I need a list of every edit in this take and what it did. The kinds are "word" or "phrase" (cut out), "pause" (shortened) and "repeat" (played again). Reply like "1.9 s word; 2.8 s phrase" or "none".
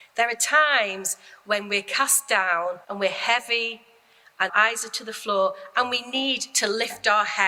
2.8 s pause; 4.5 s word